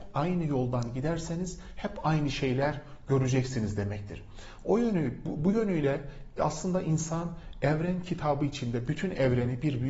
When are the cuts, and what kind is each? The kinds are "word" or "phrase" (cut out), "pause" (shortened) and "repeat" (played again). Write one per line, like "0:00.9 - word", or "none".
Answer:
none